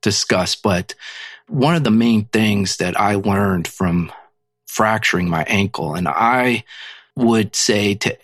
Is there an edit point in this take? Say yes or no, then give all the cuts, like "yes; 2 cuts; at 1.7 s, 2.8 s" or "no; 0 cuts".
no; 0 cuts